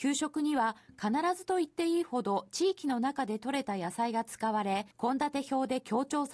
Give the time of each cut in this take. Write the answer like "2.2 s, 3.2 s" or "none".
4.9 s